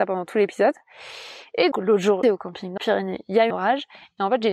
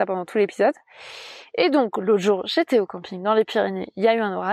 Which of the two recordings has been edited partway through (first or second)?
first